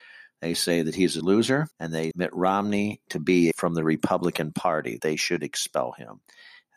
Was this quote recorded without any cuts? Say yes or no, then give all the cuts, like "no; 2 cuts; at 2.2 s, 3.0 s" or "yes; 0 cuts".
no; 5 cuts; at 1.2 s, 1.7 s, 2.1 s, 3.5 s, 5.0 s